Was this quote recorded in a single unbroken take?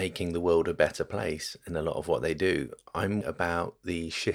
no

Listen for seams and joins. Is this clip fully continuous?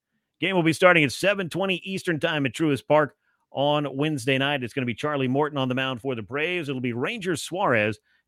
yes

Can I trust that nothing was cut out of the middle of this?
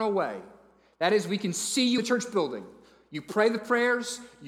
no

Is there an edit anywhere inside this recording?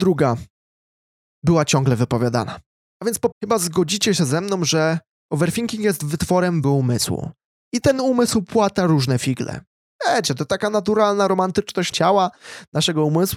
yes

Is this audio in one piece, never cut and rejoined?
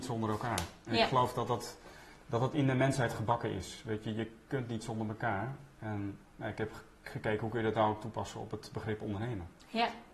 no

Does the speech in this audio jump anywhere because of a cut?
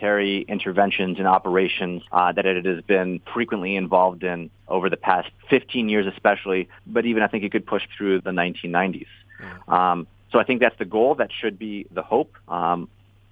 yes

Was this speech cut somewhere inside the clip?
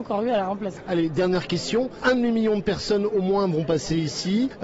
no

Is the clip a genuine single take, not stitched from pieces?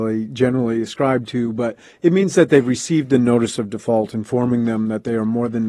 yes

